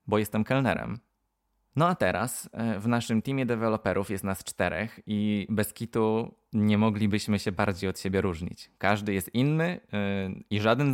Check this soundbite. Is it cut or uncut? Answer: uncut